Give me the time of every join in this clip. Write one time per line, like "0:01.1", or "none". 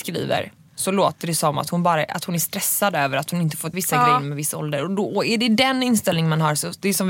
0:03.7